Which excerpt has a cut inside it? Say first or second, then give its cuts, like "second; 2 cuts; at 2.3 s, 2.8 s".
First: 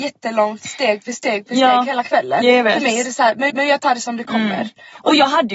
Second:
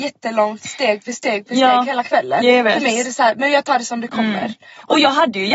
first; 1 cut; at 3.5 s